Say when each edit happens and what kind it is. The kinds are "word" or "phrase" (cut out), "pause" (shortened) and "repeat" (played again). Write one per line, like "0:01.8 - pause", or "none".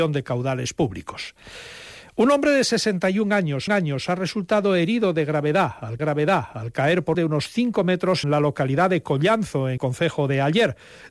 0:03.7 - repeat
0:06.0 - repeat
0:07.1 - phrase
0:08.2 - word
0:09.8 - word